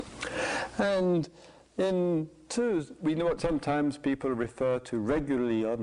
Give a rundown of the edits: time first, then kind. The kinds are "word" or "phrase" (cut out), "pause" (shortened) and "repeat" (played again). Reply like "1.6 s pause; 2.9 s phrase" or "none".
2.5 s word; 3.4 s phrase